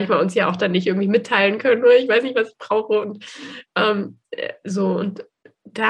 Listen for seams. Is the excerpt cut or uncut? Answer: uncut